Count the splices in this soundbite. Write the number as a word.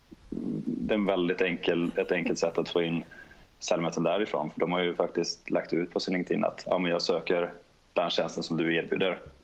zero